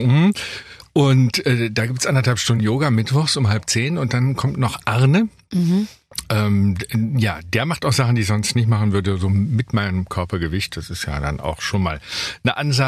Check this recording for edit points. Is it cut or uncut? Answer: uncut